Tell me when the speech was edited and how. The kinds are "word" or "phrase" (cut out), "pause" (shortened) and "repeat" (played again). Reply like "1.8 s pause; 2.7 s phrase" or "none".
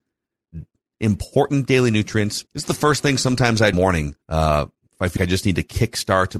2.5 s pause; 3.7 s phrase; 4.2 s pause; 5.2 s word